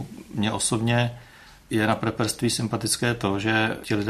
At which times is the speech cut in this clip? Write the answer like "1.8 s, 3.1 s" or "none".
none

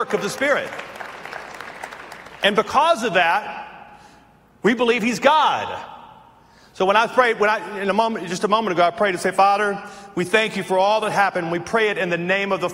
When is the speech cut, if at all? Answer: none

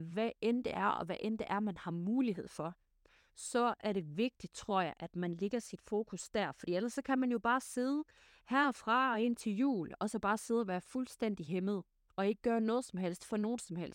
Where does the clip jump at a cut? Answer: none

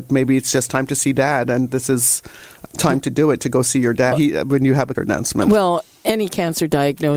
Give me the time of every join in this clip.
2.6 s, 4.1 s, 4.9 s

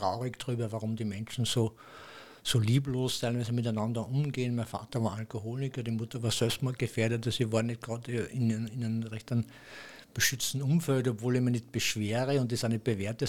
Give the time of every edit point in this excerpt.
none

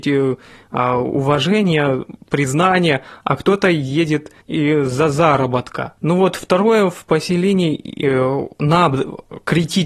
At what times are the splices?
4.4 s, 6.0 s

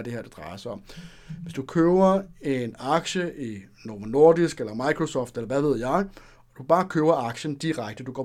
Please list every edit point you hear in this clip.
none

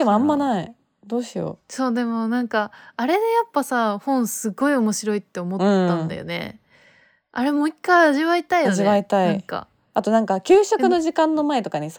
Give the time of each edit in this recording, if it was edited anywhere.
none

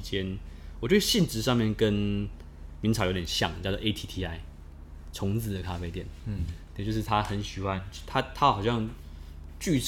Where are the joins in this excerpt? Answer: none

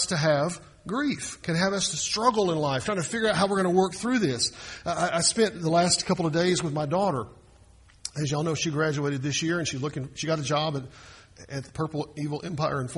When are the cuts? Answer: 11.7 s

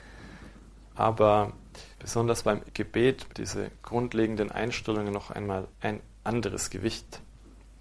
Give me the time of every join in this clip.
1.9 s, 2.6 s, 3.3 s, 5.7 s

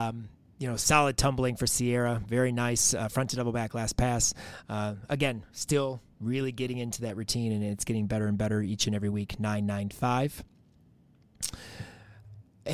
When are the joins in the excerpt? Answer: none

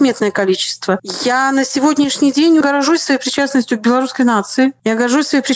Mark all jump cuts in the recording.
2.6 s

